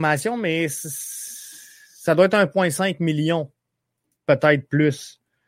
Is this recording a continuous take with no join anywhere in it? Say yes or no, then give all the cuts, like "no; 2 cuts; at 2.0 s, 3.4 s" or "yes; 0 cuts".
yes; 0 cuts